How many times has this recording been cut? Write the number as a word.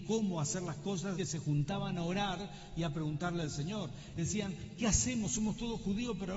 two